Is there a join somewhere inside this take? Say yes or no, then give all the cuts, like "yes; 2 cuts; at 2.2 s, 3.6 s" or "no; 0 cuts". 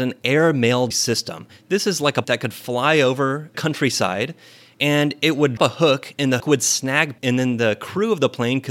yes; 6 cuts; at 0.9 s, 2.2 s, 3.5 s, 5.6 s, 6.4 s, 7.2 s